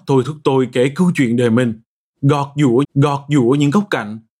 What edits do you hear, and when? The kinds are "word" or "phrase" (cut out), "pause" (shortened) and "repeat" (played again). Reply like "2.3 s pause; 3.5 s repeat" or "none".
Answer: 2.8 s repeat